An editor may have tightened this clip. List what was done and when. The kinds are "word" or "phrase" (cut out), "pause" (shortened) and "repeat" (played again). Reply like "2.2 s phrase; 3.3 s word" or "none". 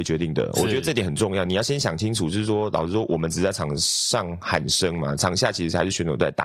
none